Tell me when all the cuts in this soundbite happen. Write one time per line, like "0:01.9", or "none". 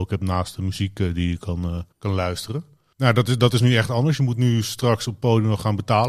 0:01.9